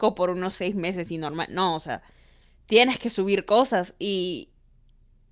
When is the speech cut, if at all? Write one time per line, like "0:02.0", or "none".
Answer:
none